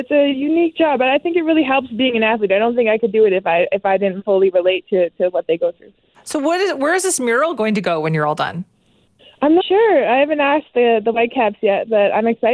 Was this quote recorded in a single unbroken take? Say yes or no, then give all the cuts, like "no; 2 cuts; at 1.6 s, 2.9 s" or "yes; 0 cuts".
no; 2 cuts; at 4.2 s, 9.6 s